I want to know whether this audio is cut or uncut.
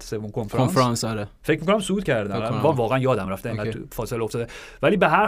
uncut